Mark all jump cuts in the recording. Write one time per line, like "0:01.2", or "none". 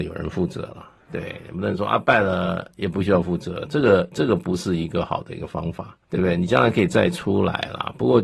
0:06.0